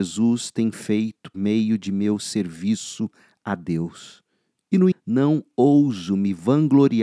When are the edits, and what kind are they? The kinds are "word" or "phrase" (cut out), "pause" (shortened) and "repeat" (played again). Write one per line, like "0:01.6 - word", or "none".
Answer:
0:01.3 - word
0:04.9 - word